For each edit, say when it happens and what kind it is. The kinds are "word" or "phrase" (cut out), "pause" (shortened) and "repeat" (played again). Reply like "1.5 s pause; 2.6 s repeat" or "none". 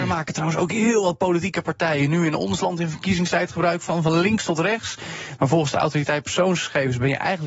none